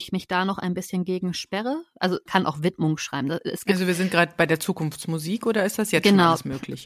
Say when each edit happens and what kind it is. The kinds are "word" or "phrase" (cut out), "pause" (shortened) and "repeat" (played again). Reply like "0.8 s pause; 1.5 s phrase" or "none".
2.3 s word